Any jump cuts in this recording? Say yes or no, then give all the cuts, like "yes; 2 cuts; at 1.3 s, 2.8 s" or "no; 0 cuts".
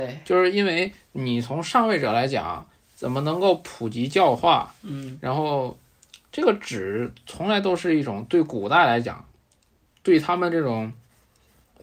no; 0 cuts